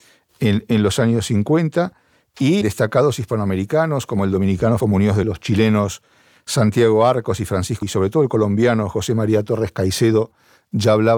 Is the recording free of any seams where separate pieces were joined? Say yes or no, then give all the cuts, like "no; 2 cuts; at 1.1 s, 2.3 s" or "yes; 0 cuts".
no; 4 cuts; at 2.6 s, 4.8 s, 5.2 s, 7.8 s